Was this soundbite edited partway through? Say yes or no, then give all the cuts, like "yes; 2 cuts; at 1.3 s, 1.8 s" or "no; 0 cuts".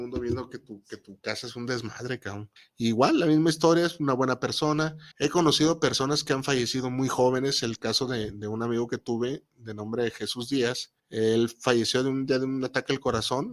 yes; 3 cuts; at 2.6 s, 5.1 s, 11.0 s